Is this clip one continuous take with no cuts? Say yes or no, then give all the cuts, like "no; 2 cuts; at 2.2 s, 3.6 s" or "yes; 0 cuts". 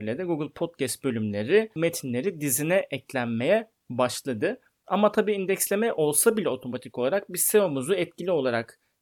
no; 1 cut; at 1.8 s